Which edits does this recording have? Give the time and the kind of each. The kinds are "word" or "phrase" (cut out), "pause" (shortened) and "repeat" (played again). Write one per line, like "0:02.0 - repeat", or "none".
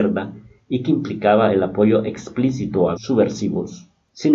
0:03.0 - word